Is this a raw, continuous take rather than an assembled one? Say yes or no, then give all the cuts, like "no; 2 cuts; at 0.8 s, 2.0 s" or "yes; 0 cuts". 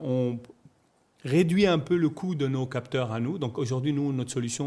yes; 0 cuts